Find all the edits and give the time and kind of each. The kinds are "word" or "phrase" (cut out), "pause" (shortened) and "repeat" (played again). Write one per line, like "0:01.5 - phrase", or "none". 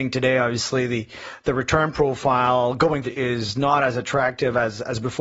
0:03.0 - word